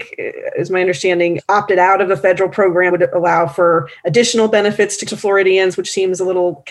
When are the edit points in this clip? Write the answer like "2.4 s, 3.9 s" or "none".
2.9 s, 5.1 s